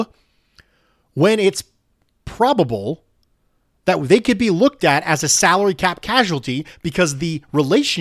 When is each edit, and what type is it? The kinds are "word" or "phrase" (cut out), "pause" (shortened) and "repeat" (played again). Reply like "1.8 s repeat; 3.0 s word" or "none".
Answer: none